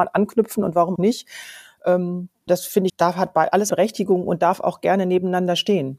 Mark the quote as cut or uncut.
cut